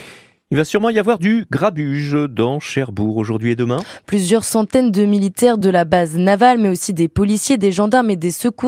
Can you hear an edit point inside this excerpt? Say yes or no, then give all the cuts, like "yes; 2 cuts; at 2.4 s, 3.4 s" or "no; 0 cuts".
no; 0 cuts